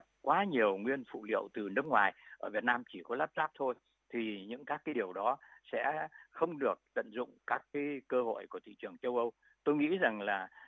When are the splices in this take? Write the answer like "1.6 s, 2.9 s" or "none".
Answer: none